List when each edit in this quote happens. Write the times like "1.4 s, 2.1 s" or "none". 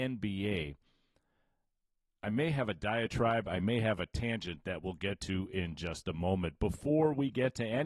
none